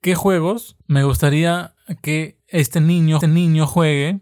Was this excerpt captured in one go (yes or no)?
no